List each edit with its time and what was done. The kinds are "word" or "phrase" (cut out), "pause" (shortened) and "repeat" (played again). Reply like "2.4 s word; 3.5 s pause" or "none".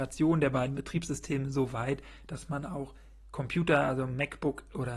none